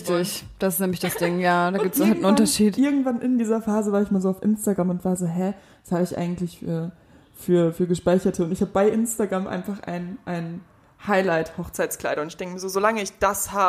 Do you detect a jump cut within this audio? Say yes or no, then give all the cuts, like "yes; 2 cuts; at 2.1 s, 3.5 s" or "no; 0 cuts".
no; 0 cuts